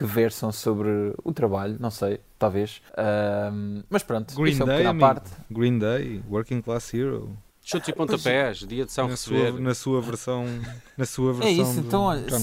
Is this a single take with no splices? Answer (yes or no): no